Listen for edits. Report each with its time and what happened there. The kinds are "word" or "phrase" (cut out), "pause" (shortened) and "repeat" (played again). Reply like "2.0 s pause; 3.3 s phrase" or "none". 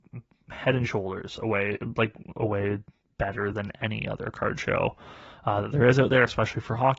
none